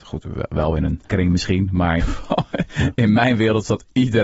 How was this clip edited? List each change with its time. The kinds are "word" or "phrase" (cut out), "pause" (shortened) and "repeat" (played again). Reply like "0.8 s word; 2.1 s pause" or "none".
1.1 s word; 2.0 s word